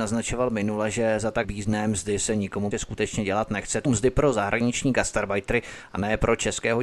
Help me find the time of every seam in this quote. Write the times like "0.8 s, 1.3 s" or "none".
1.4 s, 2.7 s, 3.8 s